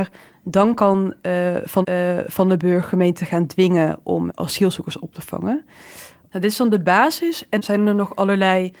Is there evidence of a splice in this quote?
yes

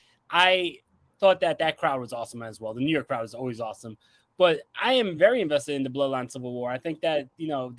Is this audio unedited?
yes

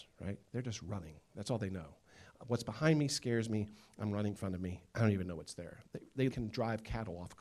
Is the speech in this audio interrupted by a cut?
yes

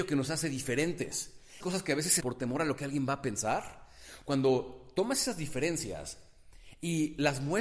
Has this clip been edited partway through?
yes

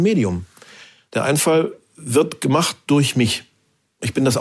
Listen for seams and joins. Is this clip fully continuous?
yes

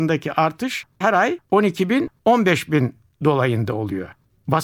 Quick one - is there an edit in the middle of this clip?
yes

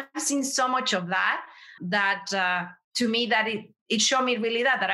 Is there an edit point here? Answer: yes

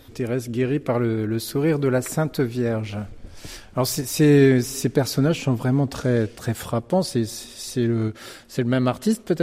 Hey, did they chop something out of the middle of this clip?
no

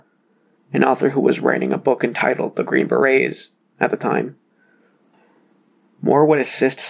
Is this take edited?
no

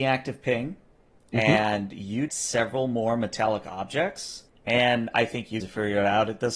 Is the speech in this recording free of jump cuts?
no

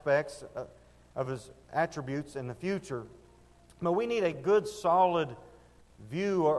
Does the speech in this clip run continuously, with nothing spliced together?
yes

